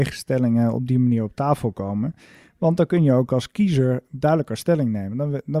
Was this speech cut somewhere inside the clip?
no; 0 cuts

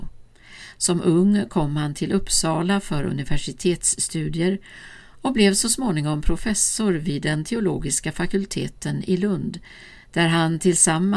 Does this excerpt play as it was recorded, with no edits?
yes; 0 cuts

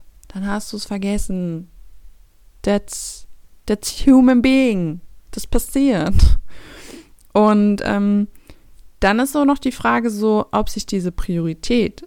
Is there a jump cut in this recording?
no; 0 cuts

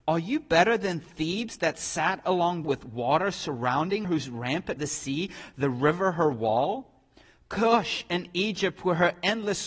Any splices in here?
yes; 3 cuts; at 2.6 s, 4.0 s, 4.8 s

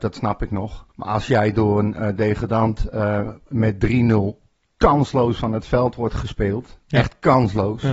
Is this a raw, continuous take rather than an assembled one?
no; 1 cut; at 0.9 s

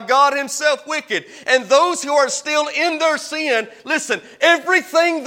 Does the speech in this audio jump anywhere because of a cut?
no; 0 cuts

